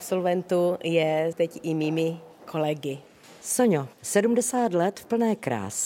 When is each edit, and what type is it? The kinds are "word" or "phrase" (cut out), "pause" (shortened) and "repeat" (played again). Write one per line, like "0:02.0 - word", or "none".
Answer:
0:03.9 - pause